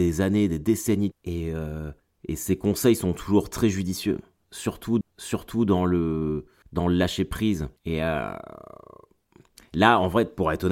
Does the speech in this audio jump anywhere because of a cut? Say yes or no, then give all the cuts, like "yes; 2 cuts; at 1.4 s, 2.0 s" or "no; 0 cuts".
yes; 5 cuts; at 1.1 s, 2.0 s, 5.0 s, 6.6 s, 7.8 s